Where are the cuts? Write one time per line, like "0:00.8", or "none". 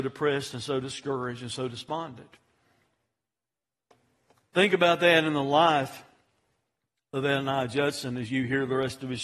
none